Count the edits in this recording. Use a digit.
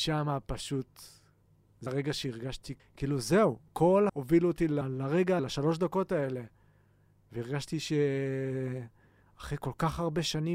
5